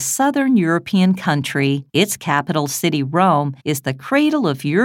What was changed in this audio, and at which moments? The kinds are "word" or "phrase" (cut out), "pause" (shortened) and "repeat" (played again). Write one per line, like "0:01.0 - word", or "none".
0:01.9 - pause
0:03.6 - pause